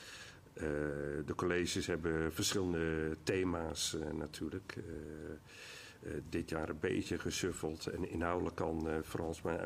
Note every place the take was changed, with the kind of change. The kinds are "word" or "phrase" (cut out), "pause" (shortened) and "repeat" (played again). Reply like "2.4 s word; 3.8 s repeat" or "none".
none

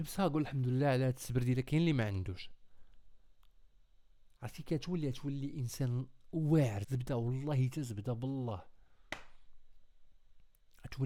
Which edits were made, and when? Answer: 6.8 s word

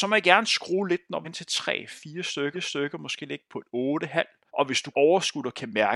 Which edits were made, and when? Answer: 1.2 s word; 2.5 s repeat; 3.5 s word; 4.5 s pause; 4.9 s word

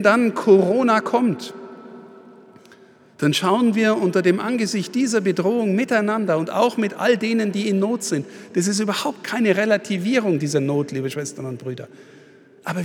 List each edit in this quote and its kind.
none

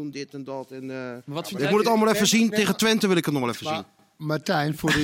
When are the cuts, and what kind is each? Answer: 4.0 s repeat

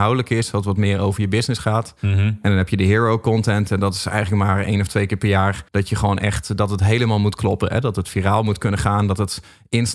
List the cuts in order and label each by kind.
5.7 s pause

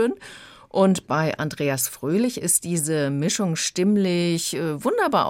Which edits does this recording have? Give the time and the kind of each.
none

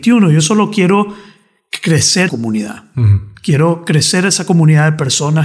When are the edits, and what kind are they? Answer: 2.3 s word

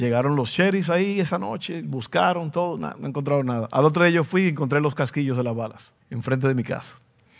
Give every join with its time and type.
6.0 s pause

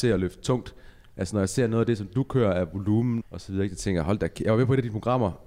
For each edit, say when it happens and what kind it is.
3.2 s word

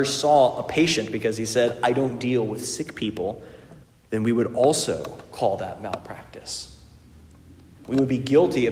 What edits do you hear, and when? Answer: 3.8 s pause

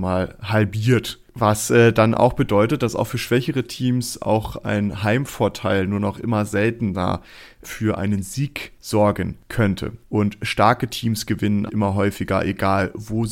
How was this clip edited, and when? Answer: 7.6 s word; 11.7 s word

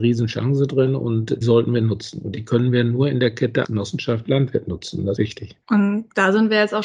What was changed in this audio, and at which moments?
1.4 s word; 3.6 s word; 5.2 s word

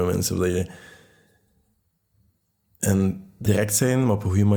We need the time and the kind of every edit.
3.5 s word

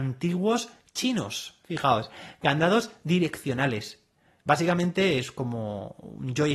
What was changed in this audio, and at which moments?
none

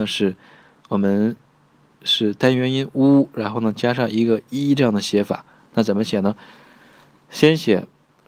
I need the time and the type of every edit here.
none

